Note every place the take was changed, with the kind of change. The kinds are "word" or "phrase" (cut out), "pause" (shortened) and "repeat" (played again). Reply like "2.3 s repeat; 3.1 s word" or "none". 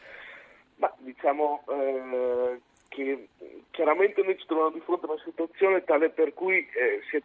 none

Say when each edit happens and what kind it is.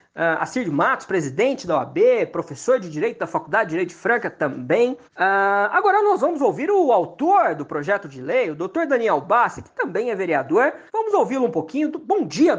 5.0 s pause; 10.9 s pause

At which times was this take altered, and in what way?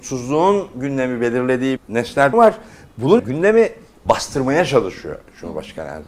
1.8 s word; 2.3 s word; 3.2 s word

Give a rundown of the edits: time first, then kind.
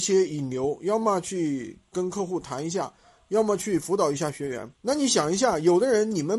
4.7 s pause

